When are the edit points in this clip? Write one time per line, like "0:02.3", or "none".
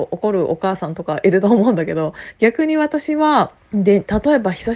0:03.6